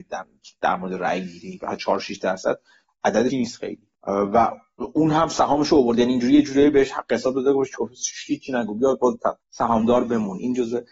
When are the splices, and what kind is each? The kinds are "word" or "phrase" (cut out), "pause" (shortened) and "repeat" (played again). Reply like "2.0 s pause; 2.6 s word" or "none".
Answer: 3.3 s word; 3.9 s pause; 9.4 s pause